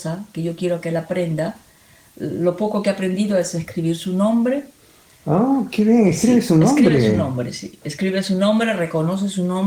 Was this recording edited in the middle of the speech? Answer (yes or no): no